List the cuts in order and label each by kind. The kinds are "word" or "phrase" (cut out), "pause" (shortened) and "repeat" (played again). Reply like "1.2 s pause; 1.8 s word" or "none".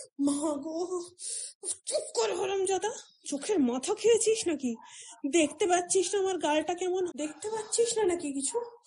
7.1 s word